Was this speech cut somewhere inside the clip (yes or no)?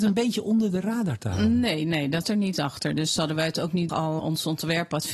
yes